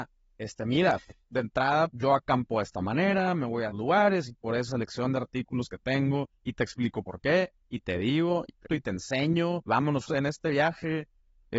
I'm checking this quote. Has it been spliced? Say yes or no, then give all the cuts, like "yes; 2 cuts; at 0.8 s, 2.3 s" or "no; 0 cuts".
yes; 6 cuts; at 1.9 s, 3.7 s, 4.7 s, 8.7 s, 9.7 s, 10.1 s